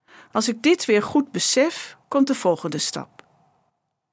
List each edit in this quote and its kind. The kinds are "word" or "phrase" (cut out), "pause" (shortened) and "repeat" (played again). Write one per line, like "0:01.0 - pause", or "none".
0:02.0 - pause